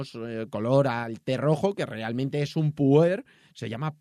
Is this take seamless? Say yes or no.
yes